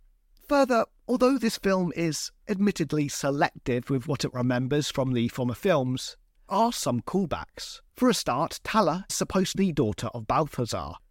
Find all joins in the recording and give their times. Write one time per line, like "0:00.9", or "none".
0:06.5
0:07.9
0:09.1
0:09.5

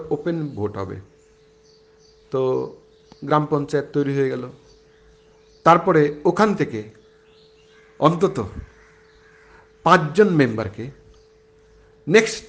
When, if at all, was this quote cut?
none

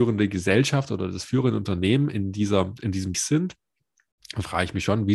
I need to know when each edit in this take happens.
0:03.1

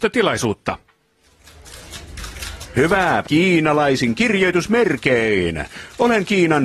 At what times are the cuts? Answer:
0:03.2

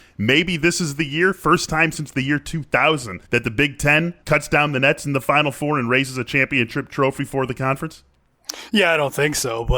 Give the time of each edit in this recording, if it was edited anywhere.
0:03.3
0:04.2

